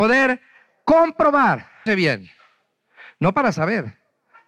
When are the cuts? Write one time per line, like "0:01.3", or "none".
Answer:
0:01.9